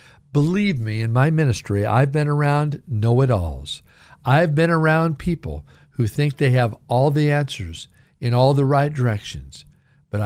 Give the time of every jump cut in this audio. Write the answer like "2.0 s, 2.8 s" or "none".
none